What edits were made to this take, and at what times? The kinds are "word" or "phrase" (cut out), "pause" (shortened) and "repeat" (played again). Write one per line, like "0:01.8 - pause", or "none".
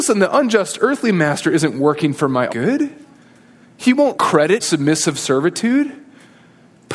0:02.5 - word
0:04.1 - word
0:04.6 - word